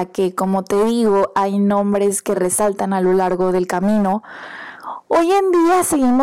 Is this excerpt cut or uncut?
uncut